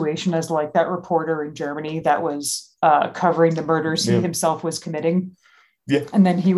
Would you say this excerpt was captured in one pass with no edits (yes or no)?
yes